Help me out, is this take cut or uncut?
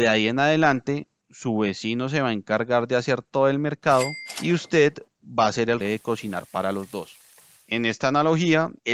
cut